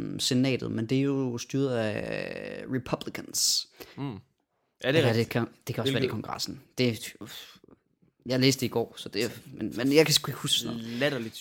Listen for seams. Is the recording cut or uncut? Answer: cut